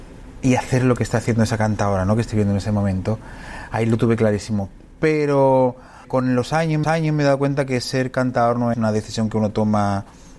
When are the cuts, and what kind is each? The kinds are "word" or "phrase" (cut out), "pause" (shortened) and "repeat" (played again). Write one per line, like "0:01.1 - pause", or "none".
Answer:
0:06.0 - word
0:06.8 - repeat
0:08.7 - word